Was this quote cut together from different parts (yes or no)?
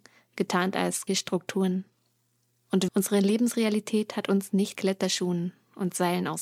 yes